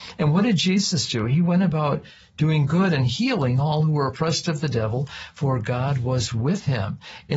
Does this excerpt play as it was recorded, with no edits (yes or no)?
yes